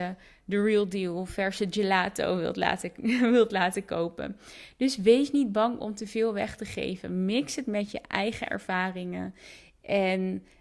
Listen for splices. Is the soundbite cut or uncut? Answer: uncut